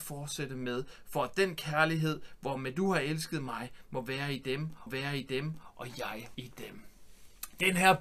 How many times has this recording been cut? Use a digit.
2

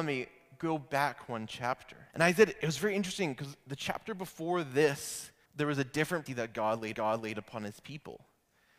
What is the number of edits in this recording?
4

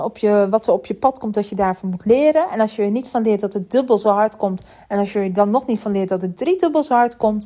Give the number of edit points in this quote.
0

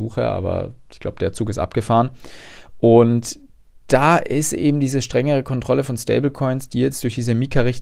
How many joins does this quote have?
0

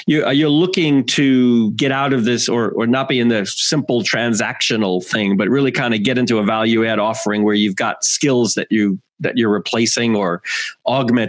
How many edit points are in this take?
0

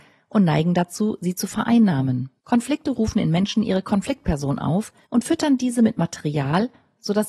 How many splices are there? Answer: 2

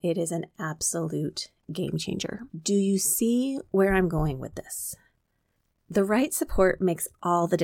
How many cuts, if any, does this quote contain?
1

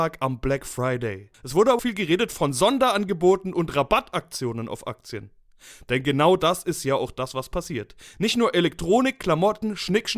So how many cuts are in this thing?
2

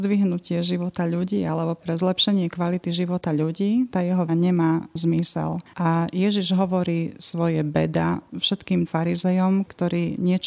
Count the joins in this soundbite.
3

